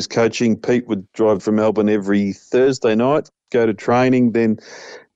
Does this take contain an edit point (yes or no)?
yes